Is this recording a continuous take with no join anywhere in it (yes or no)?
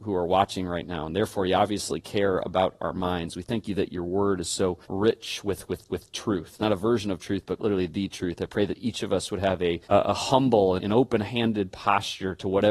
no